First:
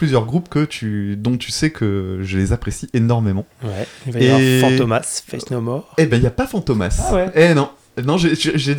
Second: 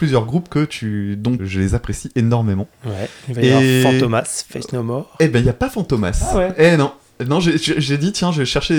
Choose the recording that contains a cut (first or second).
second